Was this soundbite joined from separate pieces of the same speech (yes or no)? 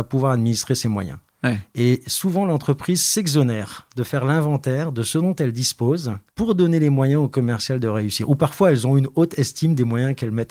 yes